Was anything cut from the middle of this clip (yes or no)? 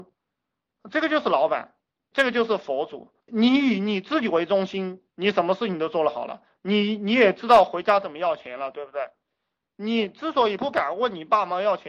yes